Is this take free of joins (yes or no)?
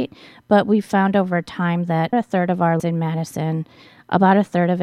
no